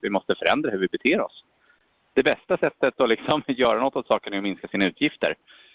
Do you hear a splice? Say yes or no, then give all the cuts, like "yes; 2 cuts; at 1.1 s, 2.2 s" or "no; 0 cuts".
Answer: no; 0 cuts